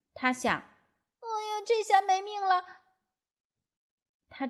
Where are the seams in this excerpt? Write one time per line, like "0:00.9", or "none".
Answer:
none